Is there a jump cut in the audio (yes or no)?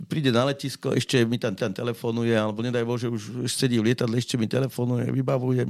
yes